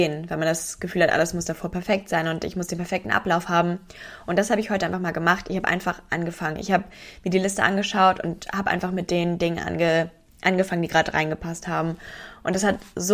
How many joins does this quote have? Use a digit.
0